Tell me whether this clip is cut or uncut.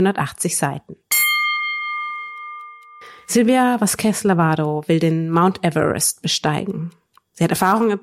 uncut